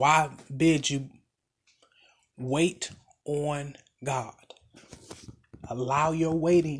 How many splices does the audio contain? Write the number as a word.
zero